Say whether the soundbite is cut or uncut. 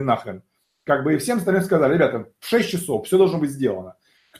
uncut